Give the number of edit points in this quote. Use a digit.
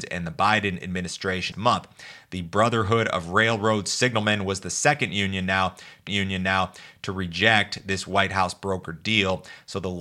2